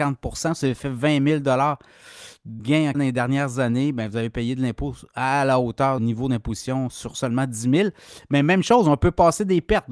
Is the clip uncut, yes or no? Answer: no